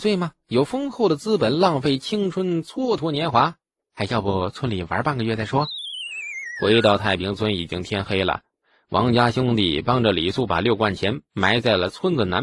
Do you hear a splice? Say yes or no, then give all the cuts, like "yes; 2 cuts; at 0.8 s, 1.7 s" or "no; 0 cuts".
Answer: no; 0 cuts